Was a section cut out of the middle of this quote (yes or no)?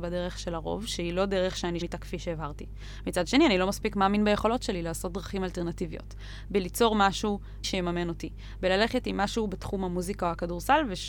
yes